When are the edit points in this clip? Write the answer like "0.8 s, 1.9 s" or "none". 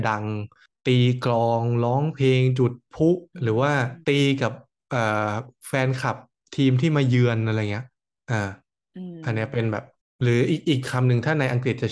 3.3 s, 4.0 s